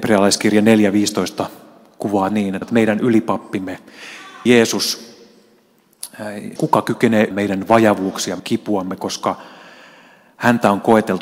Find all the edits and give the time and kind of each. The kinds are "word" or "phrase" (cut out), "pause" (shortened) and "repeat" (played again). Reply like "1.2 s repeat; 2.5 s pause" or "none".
2.3 s word; 2.6 s word; 4.5 s word; 6.6 s word; 7.3 s word; 8.4 s word